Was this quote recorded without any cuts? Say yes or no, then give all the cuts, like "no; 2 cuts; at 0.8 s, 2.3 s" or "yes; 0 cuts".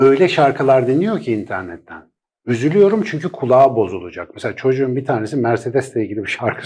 yes; 0 cuts